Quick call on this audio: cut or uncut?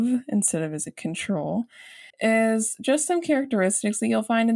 cut